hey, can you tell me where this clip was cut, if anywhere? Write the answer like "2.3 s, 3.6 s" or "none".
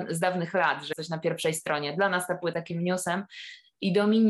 0.9 s, 2.5 s